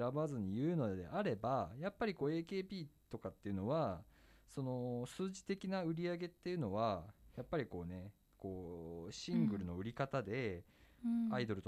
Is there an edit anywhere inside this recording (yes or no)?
no